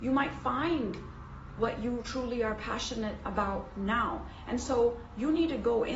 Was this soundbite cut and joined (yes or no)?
no